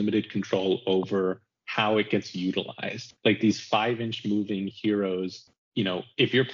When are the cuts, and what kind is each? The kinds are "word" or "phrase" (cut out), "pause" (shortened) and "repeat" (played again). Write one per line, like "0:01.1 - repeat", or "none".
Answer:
0:03.2 - pause